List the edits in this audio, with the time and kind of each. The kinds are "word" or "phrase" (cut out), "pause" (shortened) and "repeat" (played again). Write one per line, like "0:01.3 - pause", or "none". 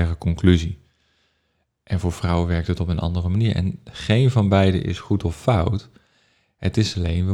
none